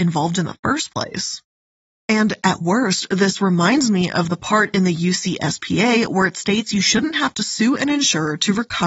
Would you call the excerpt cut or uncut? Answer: uncut